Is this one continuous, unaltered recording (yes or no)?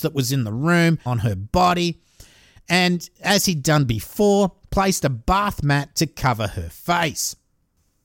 no